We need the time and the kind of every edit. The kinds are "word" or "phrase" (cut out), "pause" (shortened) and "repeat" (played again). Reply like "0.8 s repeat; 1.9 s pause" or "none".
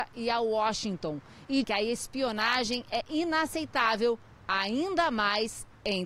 1.6 s word